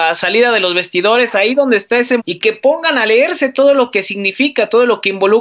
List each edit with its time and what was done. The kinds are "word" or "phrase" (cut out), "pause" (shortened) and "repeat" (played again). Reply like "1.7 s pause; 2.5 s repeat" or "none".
2.2 s word